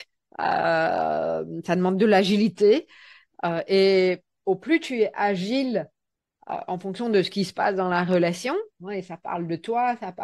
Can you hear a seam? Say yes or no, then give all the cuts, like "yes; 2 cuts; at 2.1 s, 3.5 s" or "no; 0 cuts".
no; 0 cuts